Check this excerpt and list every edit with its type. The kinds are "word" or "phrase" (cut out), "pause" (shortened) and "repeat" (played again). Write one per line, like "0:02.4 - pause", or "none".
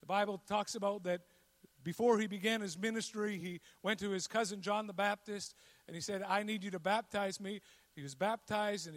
none